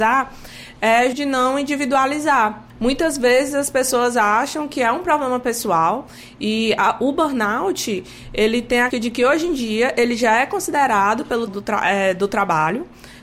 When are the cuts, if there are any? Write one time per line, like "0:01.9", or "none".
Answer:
0:01.1
0:02.7
0:08.9
0:11.5